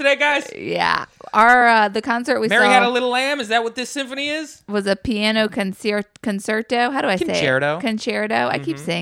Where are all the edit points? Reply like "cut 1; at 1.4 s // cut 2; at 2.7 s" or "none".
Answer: none